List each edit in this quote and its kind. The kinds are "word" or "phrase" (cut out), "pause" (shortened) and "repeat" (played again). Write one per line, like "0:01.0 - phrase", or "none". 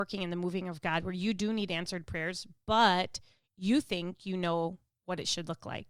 none